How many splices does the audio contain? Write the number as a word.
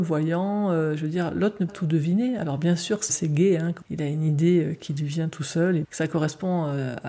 four